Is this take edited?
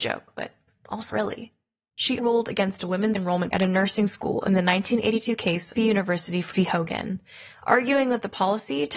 yes; 6 cuts; at 1.1 s, 2.2 s, 3.1 s, 3.5 s, 5.8 s, 6.5 s

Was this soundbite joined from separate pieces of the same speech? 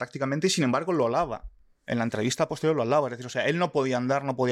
no; 0 cuts

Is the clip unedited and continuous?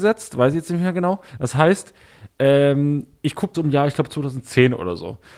no; 2 cuts; at 1.3 s, 3.5 s

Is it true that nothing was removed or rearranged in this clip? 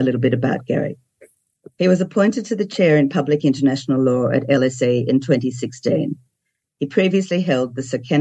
yes; 0 cuts

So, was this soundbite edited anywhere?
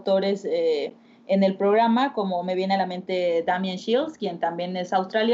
no; 0 cuts

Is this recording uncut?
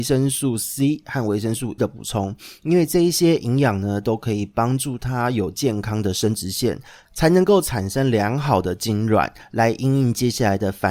no; 1 cut; at 1.8 s

